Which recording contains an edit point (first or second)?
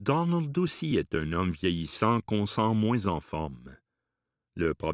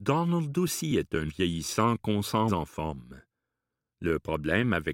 second